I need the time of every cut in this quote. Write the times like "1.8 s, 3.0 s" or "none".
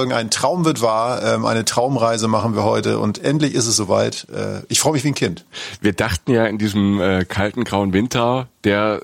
none